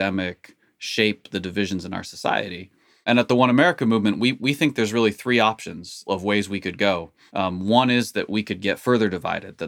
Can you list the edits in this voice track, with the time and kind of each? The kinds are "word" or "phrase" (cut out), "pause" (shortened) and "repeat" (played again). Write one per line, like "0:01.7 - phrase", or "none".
none